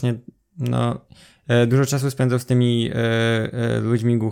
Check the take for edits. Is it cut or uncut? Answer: uncut